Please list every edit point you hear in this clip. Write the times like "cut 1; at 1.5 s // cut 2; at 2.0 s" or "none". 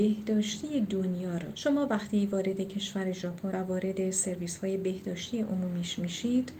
cut 1; at 1.5 s // cut 2; at 3.5 s